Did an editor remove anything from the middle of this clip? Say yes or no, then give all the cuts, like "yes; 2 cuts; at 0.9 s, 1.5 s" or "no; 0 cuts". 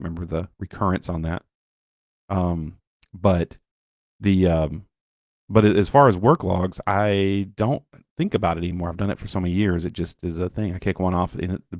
no; 0 cuts